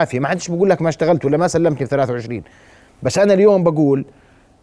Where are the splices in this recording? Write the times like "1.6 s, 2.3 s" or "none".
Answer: none